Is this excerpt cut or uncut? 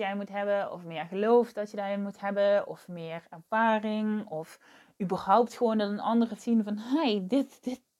cut